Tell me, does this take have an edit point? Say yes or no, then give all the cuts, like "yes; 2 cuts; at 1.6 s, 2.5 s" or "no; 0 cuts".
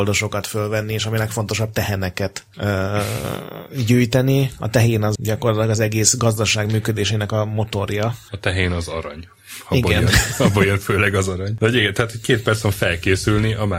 yes; 1 cut; at 5.2 s